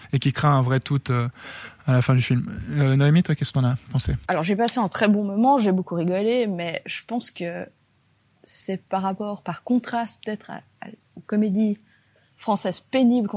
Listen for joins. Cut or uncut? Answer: uncut